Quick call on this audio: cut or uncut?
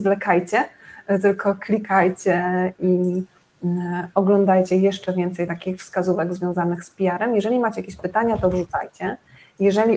uncut